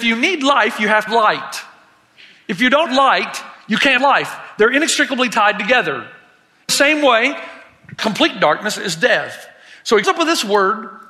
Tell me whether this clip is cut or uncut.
cut